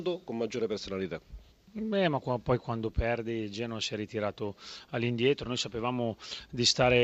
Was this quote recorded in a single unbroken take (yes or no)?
yes